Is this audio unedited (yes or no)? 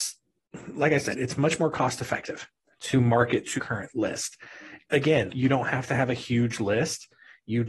no